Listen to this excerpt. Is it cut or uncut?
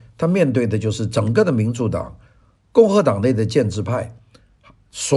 uncut